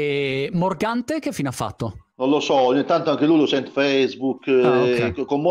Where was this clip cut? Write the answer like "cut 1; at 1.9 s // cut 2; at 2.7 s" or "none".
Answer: cut 1; at 2.1 s // cut 2; at 3.7 s